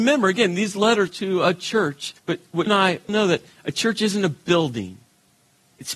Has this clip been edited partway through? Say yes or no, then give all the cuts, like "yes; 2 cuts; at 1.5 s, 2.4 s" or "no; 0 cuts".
yes; 4 cuts; at 1.1 s, 2.2 s, 2.7 s, 3.1 s